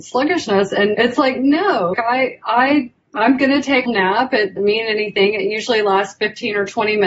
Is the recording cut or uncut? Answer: cut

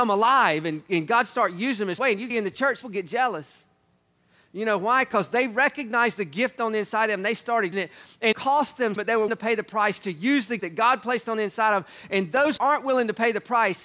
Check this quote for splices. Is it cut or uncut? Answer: cut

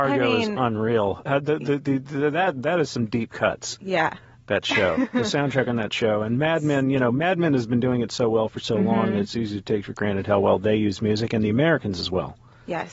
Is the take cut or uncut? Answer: uncut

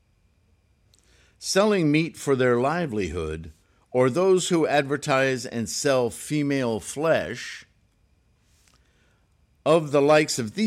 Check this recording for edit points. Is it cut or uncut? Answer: uncut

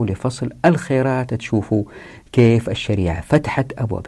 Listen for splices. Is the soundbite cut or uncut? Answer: cut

